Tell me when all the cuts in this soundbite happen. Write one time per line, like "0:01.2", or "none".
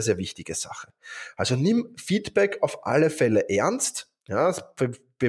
0:04.2